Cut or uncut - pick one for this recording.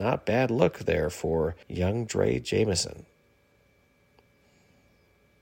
cut